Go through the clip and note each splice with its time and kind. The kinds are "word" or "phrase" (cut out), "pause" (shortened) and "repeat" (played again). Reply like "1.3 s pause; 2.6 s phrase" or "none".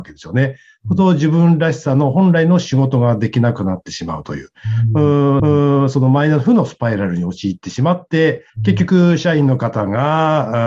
5.4 s repeat; 8.5 s pause